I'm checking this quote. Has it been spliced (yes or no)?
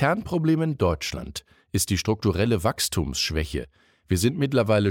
no